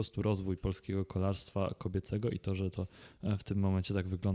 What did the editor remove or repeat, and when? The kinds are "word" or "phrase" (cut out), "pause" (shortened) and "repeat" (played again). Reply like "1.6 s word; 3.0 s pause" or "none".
none

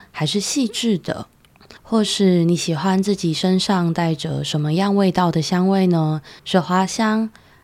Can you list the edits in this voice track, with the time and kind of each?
1.8 s pause; 6.4 s pause

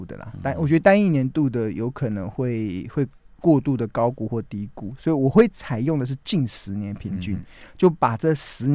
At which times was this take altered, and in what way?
none

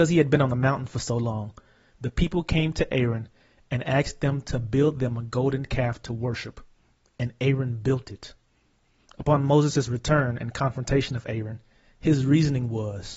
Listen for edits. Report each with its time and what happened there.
none

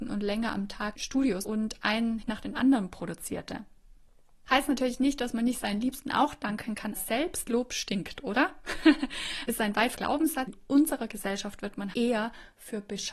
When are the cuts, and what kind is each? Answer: 0.9 s word; 1.4 s word; 2.2 s word; 7.0 s word; 9.9 s word; 10.5 s word; 11.9 s word

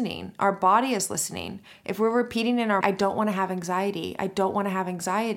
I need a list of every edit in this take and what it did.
2.8 s word

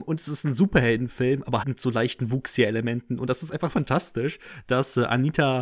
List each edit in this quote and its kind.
1.6 s word; 3.7 s word

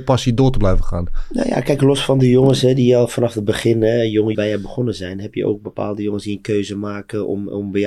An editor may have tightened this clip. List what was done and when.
4.3 s phrase

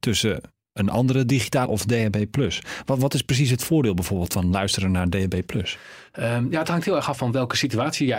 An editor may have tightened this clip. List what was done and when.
1.7 s word; 7.2 s word

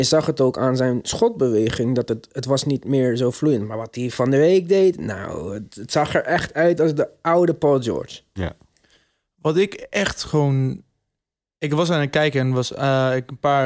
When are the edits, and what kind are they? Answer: none

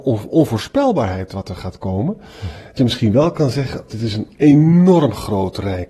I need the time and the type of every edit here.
2.8 s word; 3.9 s word

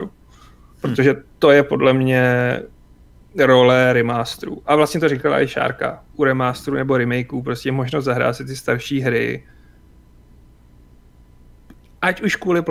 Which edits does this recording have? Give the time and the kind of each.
6.1 s pause

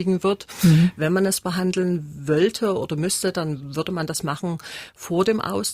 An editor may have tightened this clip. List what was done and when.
none

